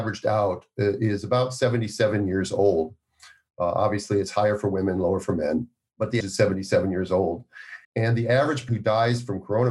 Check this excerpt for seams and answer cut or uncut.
cut